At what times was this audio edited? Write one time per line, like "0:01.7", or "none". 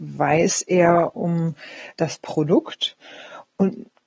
0:02.0